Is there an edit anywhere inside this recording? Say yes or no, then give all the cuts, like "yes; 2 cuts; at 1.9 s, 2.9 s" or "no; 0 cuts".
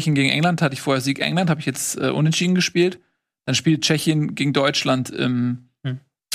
no; 0 cuts